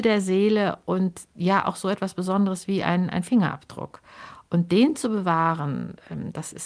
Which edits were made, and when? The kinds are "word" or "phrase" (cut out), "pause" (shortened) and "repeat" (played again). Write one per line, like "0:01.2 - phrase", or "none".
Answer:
none